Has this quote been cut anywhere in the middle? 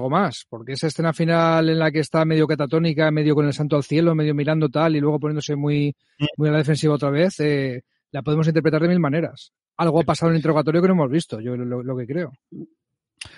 no; 0 cuts

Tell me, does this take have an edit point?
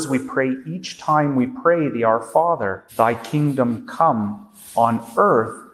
yes; 1 cut; at 2.9 s

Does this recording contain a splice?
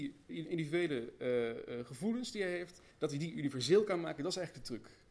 yes; 1 cut; at 2.9 s

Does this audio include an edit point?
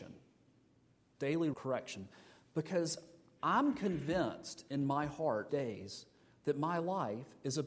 yes; 2 cuts; at 1.5 s, 5.5 s

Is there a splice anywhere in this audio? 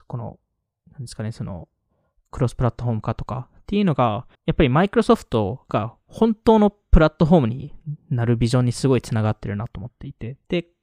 yes; 1 cut; at 4.3 s

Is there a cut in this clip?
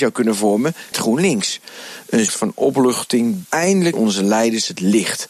yes; 4 cuts; at 0.9 s, 2.3 s, 3.5 s, 3.9 s

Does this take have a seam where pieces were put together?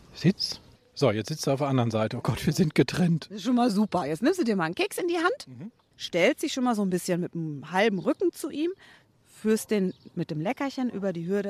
no; 0 cuts

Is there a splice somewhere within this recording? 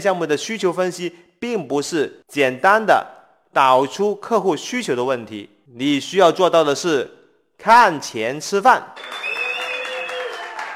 no; 0 cuts

